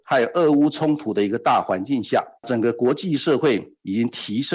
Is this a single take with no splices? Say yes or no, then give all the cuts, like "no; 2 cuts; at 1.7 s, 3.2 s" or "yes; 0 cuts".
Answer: no; 1 cut; at 2.4 s